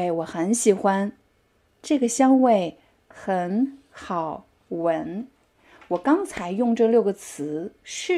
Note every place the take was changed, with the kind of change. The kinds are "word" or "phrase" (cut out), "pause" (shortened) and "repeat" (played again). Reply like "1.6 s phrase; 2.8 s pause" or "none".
none